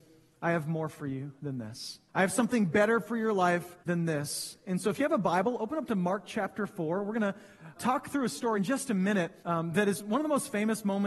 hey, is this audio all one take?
no; 5 cuts; at 2.1 s, 3.8 s, 7.8 s, 8.6 s, 9.4 s

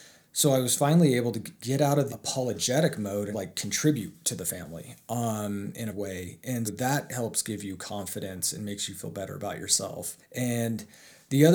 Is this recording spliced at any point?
yes; 6 cuts; at 1.6 s, 2.1 s, 3.3 s, 5.9 s, 6.7 s, 10.2 s

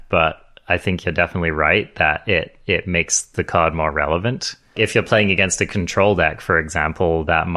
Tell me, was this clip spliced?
no; 0 cuts

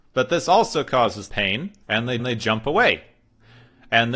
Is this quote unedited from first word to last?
no; 3 cuts; at 1.3 s, 1.8 s, 2.2 s

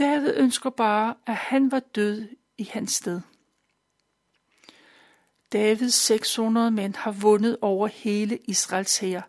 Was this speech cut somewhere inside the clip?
no; 0 cuts

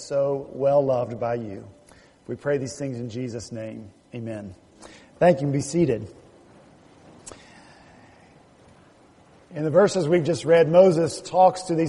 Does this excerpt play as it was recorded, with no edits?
yes; 0 cuts

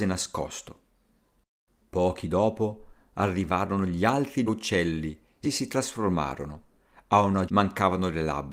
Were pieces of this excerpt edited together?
yes; 4 cuts; at 2.2 s, 4.5 s, 5.4 s, 7.5 s

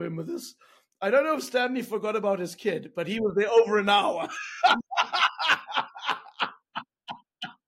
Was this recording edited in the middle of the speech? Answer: no; 0 cuts

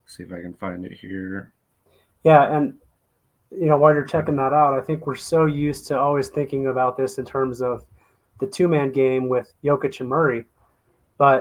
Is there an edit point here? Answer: no; 0 cuts

